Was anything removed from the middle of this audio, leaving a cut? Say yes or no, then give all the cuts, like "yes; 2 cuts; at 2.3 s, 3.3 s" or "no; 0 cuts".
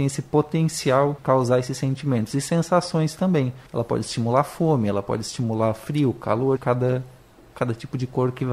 yes; 3 cuts; at 1.2 s, 3.7 s, 6.6 s